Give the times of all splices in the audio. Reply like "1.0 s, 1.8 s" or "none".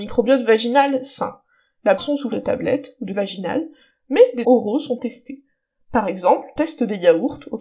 2.0 s, 2.3 s, 3.1 s, 4.4 s, 5.0 s, 6.6 s